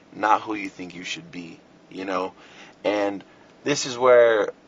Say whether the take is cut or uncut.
uncut